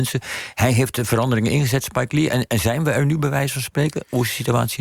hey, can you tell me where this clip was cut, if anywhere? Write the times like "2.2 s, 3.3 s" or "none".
none